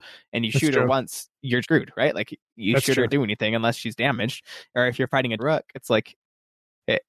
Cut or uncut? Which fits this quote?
cut